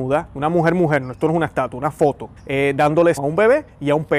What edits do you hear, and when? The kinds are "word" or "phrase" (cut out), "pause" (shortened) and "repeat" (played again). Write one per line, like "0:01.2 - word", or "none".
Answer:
0:02.4 - pause
0:03.2 - word